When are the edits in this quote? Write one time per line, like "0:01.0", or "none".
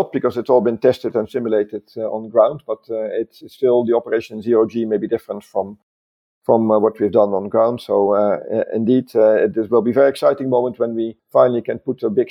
none